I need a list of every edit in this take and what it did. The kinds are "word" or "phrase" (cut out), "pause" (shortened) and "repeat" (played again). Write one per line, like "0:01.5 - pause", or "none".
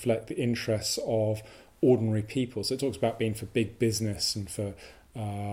none